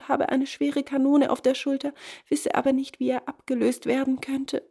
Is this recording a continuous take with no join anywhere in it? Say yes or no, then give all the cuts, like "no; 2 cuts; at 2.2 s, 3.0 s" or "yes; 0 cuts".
yes; 0 cuts